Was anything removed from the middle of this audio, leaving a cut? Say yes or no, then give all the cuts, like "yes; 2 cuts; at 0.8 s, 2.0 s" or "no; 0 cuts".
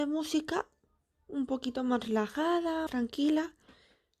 yes; 1 cut; at 2.9 s